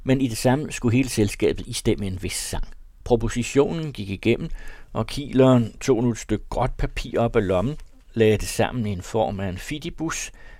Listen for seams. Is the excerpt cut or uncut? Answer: cut